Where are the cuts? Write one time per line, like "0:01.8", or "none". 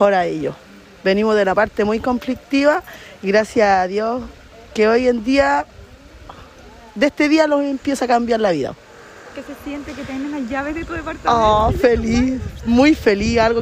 none

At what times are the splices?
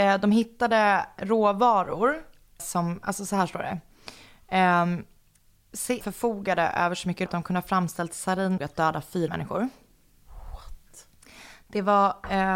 0:02.6
0:06.0
0:07.3
0:08.6
0:09.3

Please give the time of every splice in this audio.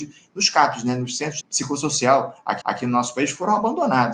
0:01.4
0:02.6

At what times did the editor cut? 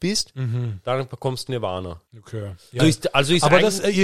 0:01.5
0:02.1
0:02.8

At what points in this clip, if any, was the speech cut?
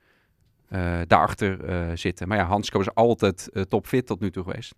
none

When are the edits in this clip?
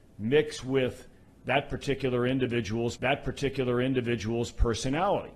0:03.0

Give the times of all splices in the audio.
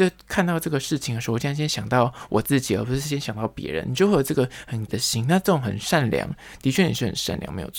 0:04.9

